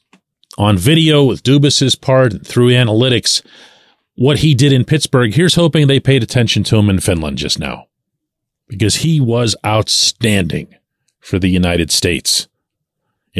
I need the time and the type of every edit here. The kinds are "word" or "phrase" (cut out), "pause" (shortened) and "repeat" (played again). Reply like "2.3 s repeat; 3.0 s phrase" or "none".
none